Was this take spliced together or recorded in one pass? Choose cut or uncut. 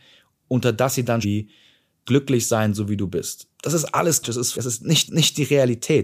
cut